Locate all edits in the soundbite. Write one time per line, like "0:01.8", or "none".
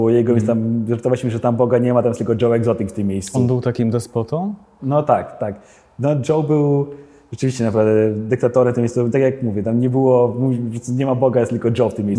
none